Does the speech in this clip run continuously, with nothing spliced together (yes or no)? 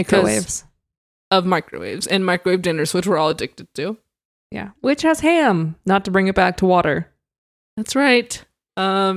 yes